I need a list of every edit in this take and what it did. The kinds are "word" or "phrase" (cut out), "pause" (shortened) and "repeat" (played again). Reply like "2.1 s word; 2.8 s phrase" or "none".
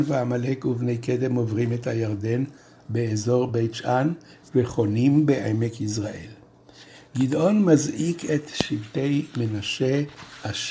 none